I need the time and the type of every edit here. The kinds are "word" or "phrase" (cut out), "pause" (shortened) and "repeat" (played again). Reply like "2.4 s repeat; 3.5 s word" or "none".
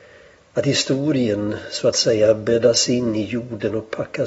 none